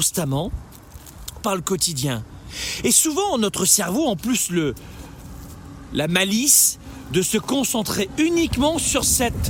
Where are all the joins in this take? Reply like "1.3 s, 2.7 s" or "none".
1.4 s